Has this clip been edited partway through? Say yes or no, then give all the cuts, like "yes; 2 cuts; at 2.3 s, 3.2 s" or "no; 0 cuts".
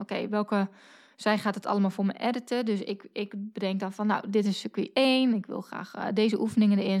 no; 0 cuts